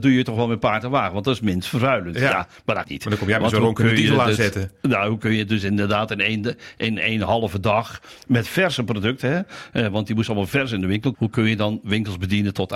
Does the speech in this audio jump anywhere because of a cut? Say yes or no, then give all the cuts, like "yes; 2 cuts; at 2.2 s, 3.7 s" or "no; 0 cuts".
yes; 2 cuts; at 2.8 s, 11.1 s